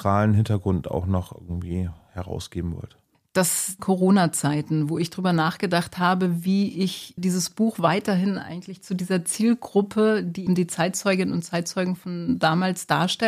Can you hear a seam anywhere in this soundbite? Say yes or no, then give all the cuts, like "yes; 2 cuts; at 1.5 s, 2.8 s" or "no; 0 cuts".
yes; 3 cuts; at 3.8 s, 7.2 s, 10.5 s